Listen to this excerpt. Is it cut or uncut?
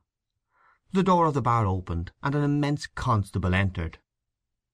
cut